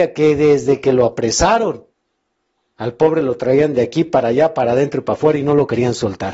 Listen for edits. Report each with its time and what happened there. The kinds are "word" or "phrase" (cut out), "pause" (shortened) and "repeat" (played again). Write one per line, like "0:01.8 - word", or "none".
none